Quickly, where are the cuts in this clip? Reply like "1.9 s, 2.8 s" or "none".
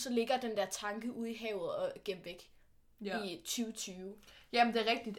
none